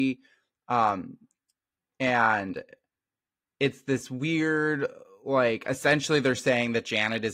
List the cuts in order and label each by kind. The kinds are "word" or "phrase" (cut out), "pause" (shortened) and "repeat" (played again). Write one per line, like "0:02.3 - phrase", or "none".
none